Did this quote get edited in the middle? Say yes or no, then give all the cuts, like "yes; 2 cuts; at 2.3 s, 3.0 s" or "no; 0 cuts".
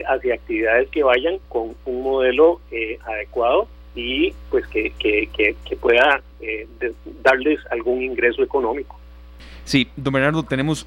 yes; 1 cut; at 1.4 s